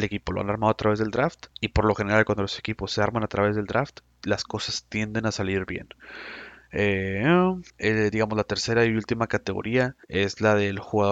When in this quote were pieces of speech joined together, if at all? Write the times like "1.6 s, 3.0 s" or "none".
1.5 s, 7.7 s, 10.0 s